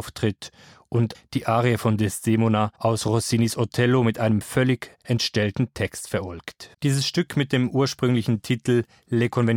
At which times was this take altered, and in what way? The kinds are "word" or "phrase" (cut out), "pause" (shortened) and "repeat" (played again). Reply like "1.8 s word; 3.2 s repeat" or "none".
1.1 s phrase; 2.8 s pause; 6.7 s pause